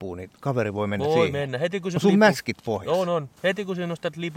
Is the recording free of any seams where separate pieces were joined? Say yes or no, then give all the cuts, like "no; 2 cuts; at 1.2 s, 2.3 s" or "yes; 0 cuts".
no; 2 cuts; at 2.0 s, 3.4 s